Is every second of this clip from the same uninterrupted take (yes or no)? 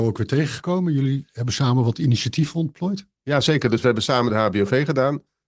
yes